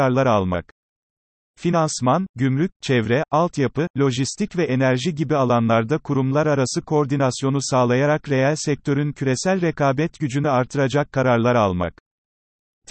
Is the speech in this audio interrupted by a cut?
no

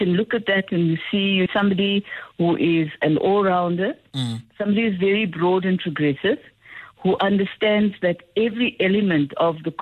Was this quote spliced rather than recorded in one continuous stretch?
yes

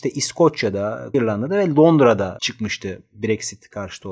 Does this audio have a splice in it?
yes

